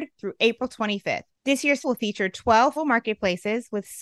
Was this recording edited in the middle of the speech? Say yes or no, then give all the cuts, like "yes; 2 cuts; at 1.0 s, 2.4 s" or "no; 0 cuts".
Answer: yes; 2 cuts; at 1.8 s, 2.8 s